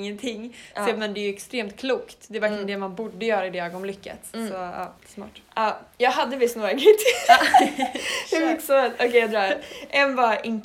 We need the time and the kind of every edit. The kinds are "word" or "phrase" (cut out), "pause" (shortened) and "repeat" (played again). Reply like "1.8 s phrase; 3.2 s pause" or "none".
5.0 s pause